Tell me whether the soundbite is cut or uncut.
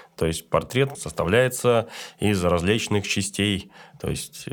cut